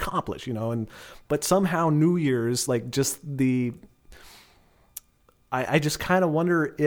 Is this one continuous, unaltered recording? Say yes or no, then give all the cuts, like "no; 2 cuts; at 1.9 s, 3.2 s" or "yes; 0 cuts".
yes; 0 cuts